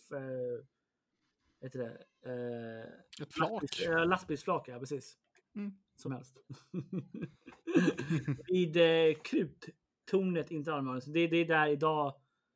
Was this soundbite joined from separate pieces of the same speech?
yes; 3 cuts; at 5.4 s, 6.0 s, 11.3 s

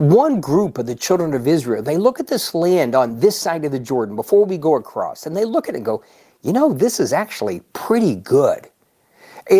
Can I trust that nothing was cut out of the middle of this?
yes; 0 cuts

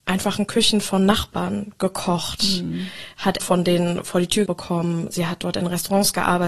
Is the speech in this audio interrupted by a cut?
yes; 2 cuts; at 3.4 s, 4.5 s

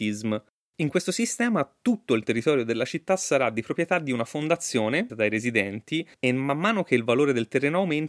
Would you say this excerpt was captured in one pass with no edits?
no; 2 cuts; at 5.1 s, 6.1 s

